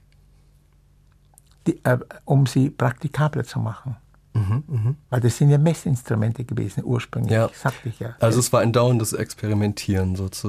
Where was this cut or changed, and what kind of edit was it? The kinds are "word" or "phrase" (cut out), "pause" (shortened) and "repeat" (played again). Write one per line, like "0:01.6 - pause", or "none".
0:05.0 - pause